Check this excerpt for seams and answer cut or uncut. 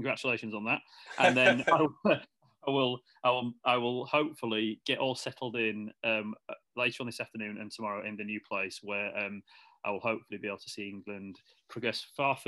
uncut